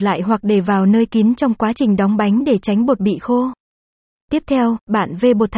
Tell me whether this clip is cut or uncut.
uncut